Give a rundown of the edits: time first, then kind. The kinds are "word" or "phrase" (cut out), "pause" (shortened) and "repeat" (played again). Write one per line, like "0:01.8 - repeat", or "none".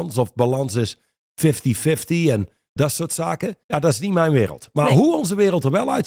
0:02.8 - word
0:03.6 - pause